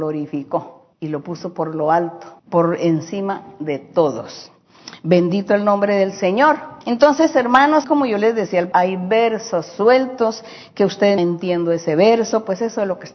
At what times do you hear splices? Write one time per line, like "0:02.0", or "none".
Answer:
0:00.9
0:02.4
0:06.8
0:07.8
0:08.7
0:11.2